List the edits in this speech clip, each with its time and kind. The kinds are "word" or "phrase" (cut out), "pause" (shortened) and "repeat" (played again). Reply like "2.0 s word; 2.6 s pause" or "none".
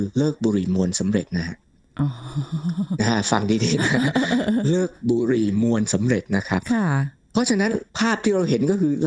7.9 s pause